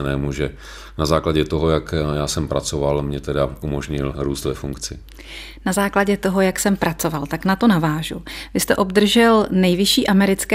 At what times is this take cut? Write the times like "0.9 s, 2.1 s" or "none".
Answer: none